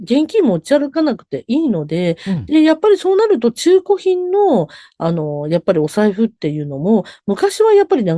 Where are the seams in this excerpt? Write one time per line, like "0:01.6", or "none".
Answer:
none